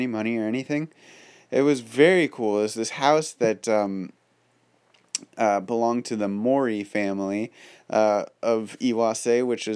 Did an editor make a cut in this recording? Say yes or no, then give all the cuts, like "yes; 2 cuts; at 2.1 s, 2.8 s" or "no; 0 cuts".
no; 0 cuts